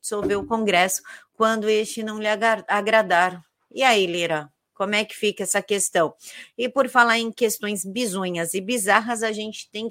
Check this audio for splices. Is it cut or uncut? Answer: uncut